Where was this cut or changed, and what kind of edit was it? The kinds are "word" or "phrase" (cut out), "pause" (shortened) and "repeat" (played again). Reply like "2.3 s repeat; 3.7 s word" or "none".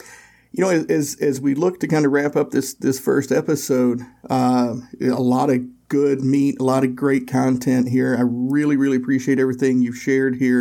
none